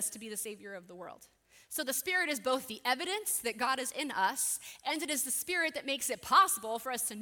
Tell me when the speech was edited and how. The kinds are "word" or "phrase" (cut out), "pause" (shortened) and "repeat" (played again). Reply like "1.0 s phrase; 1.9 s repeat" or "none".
none